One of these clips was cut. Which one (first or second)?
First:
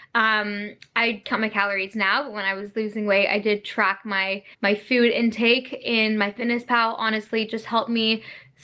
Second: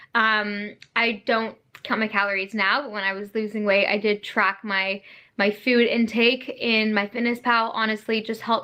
first